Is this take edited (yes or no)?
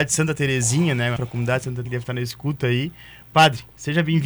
yes